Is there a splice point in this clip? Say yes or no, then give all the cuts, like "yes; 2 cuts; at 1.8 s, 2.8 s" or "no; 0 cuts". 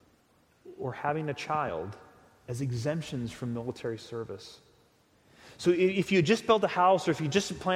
no; 0 cuts